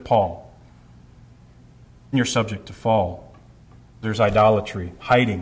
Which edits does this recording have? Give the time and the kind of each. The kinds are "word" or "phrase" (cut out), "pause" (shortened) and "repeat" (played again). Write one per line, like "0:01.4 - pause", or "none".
0:02.1 - word
0:04.0 - word